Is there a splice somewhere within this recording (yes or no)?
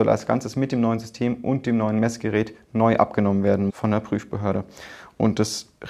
yes